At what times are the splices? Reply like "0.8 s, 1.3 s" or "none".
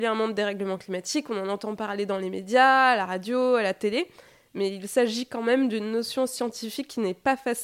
none